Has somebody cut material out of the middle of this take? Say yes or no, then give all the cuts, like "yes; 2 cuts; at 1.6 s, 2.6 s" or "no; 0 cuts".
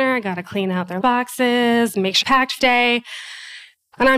yes; 3 cuts; at 1.0 s, 2.2 s, 2.6 s